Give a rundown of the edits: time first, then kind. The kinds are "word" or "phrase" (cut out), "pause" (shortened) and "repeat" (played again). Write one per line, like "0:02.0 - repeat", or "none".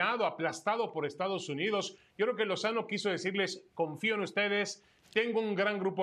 none